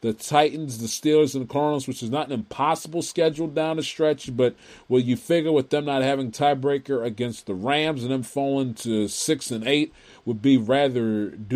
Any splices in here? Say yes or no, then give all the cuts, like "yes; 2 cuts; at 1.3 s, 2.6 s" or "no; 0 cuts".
no; 0 cuts